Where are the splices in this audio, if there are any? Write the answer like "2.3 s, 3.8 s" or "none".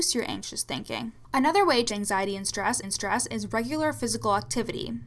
1.9 s, 2.8 s

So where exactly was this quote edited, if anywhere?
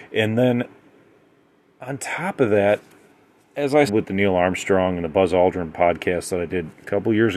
3.9 s

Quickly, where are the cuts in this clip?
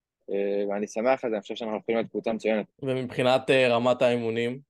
2.7 s

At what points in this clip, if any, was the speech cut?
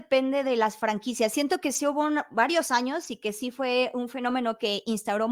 none

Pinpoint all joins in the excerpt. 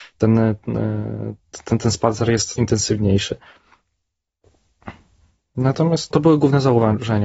2.6 s, 6.1 s

